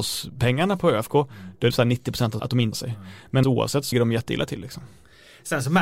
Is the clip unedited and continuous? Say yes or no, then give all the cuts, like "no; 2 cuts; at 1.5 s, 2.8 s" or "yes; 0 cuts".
no; 5 cuts; at 1.7 s, 2.4 s, 2.7 s, 3.4 s, 3.9 s